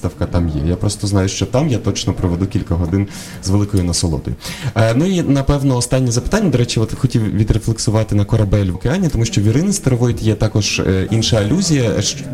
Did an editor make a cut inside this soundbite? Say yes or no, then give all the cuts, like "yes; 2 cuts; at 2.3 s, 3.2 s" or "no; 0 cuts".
yes; 2 cuts; at 8.7 s, 11.1 s